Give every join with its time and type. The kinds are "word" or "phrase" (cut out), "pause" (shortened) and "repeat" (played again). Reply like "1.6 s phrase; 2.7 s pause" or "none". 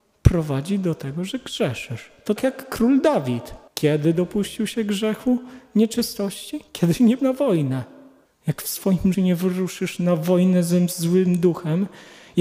2.4 s word; 3.7 s pause; 6.7 s pause; 7.2 s word; 8.3 s pause; 9.1 s word